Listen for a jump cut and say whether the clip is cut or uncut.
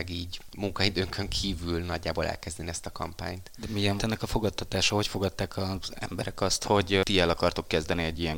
cut